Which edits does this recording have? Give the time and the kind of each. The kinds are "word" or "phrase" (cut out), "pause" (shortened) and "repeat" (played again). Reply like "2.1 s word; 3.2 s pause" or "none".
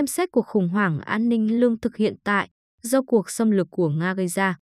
none